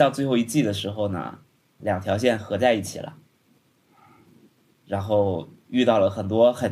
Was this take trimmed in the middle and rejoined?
yes; 1 cut; at 1.8 s

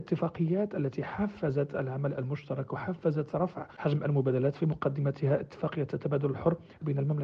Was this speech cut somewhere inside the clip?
no; 0 cuts

